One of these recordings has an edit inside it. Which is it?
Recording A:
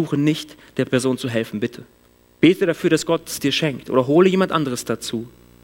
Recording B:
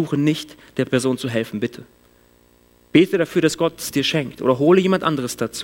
A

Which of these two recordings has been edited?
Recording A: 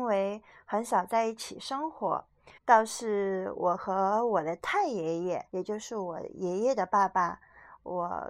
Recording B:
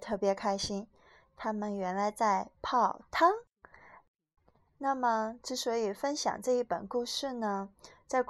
A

